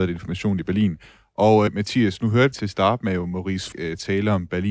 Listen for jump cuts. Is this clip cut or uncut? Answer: cut